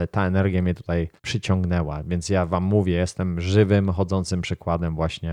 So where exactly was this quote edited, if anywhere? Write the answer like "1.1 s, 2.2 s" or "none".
1.2 s

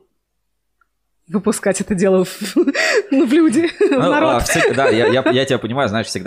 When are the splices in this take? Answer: none

